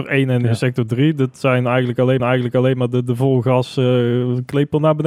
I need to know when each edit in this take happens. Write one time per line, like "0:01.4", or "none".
0:02.2